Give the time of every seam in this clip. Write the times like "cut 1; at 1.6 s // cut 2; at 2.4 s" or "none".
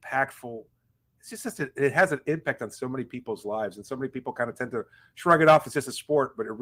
none